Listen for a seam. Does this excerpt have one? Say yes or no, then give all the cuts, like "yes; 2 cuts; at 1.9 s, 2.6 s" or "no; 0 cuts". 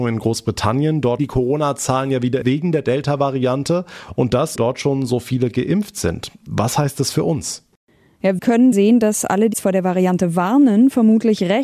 yes; 6 cuts; at 1.2 s, 2.4 s, 4.6 s, 8.4 s, 8.7 s, 9.5 s